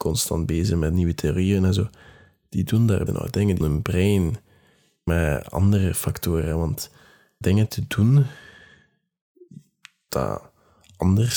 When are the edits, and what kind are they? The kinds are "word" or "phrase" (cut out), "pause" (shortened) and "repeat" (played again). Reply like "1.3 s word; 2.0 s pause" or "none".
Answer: 3.1 s word; 3.6 s word; 5.1 s word; 7.4 s word